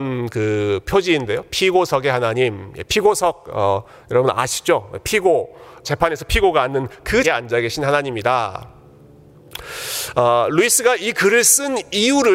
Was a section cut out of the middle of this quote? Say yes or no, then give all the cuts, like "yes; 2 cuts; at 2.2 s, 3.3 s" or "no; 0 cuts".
yes; 2 cuts; at 5.8 s, 7.2 s